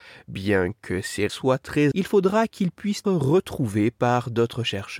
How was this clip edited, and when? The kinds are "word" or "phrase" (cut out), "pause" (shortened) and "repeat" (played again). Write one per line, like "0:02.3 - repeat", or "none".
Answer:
0:01.3 - word
0:01.9 - word
0:03.0 - word